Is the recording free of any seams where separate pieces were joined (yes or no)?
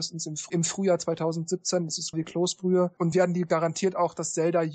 no